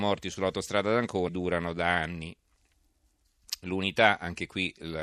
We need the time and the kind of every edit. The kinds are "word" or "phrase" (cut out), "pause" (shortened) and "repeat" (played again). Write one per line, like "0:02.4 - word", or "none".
0:01.3 - phrase